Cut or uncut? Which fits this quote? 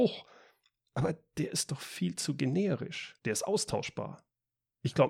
cut